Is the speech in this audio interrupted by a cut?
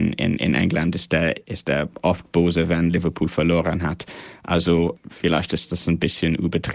no; 0 cuts

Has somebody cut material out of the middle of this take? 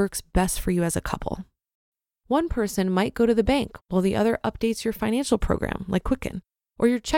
no; 0 cuts

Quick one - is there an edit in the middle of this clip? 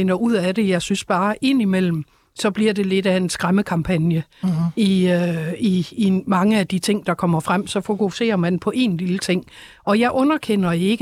no; 0 cuts

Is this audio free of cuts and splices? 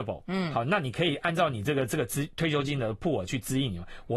yes; 0 cuts

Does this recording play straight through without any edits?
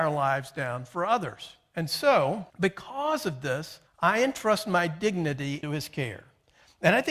no; 3 cuts; at 2.5 s, 3.9 s, 5.6 s

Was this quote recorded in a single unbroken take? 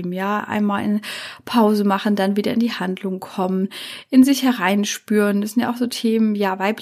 yes; 0 cuts

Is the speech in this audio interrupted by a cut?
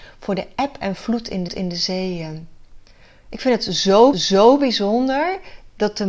yes; 2 cuts; at 1.5 s, 4.1 s

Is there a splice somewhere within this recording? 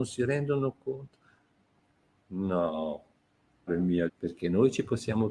yes; 2 cuts; at 3.7 s, 4.1 s

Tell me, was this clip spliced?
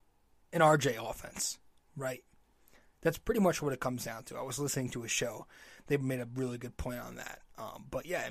no; 0 cuts

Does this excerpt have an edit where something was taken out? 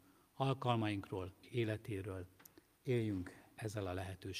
yes; 1 cut; at 1.4 s

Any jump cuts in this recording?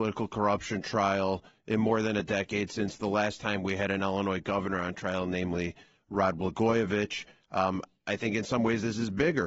no; 0 cuts

